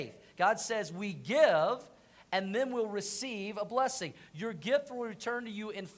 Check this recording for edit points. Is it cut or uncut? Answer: uncut